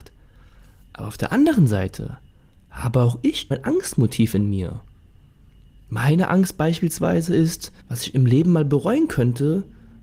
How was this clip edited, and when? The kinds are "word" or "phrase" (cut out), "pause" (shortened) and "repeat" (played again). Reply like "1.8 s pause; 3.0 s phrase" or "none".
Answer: 3.5 s word; 7.8 s pause